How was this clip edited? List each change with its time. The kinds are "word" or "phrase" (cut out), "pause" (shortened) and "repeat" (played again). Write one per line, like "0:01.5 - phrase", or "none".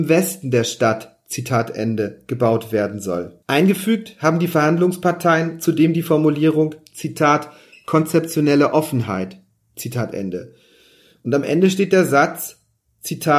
0:03.4 - pause

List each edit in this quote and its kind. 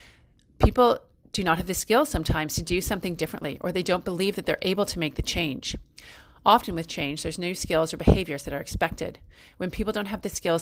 none

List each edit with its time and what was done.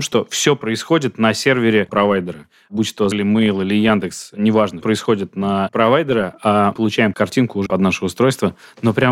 0:01.9 - word
0:03.1 - word
0:04.8 - word
0:05.7 - word
0:06.7 - word
0:07.1 - word
0:07.7 - word

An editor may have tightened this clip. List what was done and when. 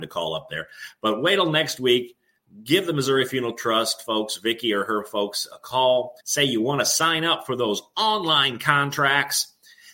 0:06.2 - pause

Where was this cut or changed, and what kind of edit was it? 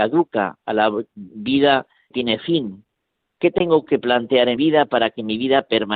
0:02.1 - word
0:03.4 - word
0:04.6 - word

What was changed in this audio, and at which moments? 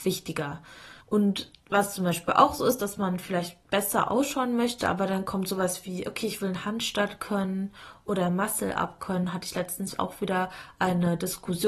0:01.0 - pause
0:03.6 - pause

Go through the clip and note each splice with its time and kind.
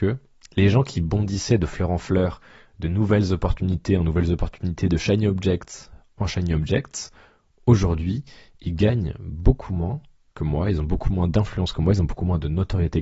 none

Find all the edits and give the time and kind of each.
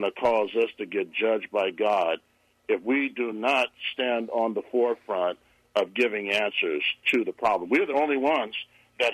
none

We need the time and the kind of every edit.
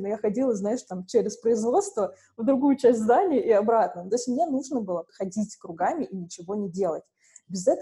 0:05.1 - word

